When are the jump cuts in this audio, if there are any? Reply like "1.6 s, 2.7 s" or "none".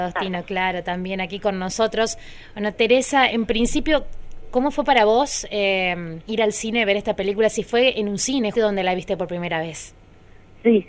3.3 s, 6.2 s, 8.5 s